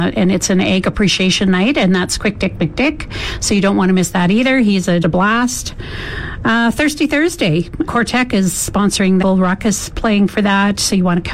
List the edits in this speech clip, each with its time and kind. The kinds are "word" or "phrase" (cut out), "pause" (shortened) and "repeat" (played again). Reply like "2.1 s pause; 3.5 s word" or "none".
5.0 s word; 7.9 s word; 9.2 s phrase